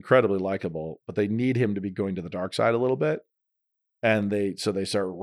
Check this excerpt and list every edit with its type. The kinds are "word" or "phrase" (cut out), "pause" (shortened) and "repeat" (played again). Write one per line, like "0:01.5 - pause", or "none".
none